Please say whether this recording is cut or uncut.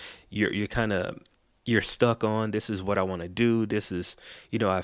uncut